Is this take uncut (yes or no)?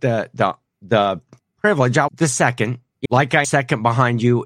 no